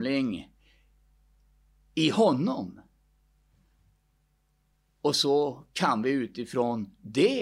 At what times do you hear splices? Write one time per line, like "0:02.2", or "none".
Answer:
none